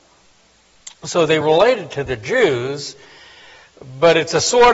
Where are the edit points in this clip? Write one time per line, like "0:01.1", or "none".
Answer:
0:01.4

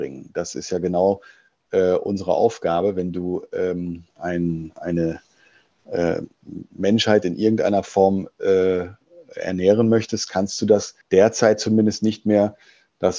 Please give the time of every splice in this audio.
0:04.1
0:11.0

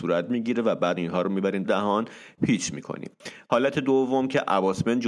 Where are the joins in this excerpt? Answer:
0:01.0
0:01.6

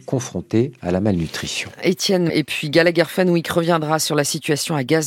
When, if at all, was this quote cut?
0:02.3

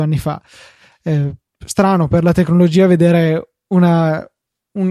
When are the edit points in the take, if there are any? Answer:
none

